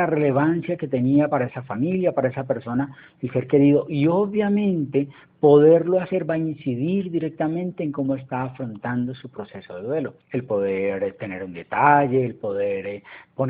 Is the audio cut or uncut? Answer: cut